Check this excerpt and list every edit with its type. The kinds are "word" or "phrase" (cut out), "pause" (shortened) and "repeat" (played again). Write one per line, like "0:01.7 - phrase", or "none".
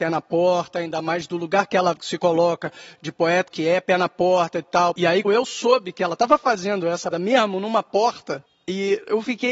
0:03.5 - word
0:05.2 - word
0:07.1 - word